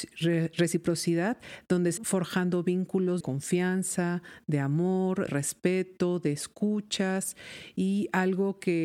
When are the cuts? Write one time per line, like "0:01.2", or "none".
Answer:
0:02.0
0:03.2
0:05.3